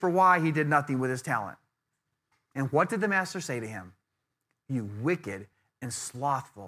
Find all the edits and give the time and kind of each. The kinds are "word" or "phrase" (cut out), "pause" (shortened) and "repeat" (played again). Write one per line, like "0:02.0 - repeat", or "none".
none